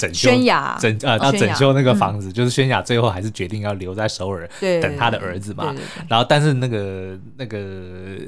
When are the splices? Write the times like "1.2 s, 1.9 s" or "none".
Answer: 1.2 s

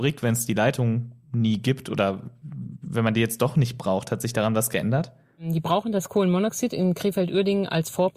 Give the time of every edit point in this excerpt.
none

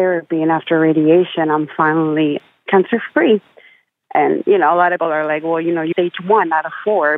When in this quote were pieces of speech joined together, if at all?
5.0 s, 5.9 s

